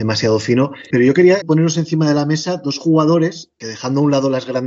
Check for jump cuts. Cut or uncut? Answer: cut